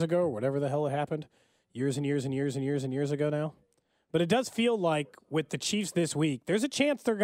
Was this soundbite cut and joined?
no; 0 cuts

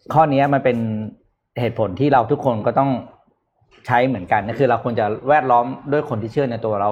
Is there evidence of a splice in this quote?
no; 0 cuts

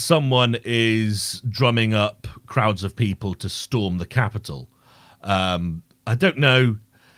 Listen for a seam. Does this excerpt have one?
no; 0 cuts

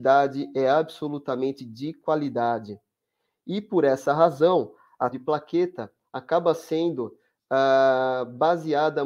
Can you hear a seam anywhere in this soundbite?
yes; 2 cuts; at 1.6 s, 5.1 s

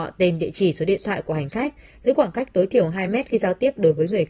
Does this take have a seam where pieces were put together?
no; 0 cuts

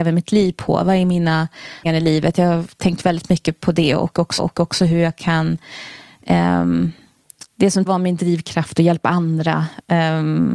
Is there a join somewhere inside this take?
yes; 4 cuts; at 1.8 s, 4.4 s, 7.5 s, 7.9 s

